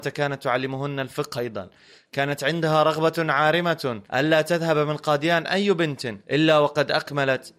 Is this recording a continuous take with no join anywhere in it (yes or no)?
no